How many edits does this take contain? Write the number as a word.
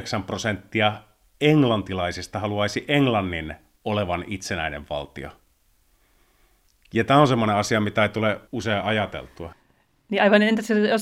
one